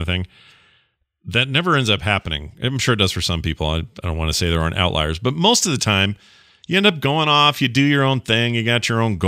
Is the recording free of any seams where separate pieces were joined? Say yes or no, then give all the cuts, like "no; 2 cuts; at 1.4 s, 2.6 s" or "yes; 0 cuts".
yes; 0 cuts